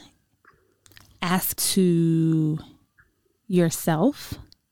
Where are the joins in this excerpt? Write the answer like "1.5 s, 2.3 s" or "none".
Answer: 1.6 s